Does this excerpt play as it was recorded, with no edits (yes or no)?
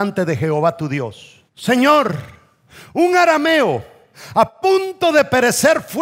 no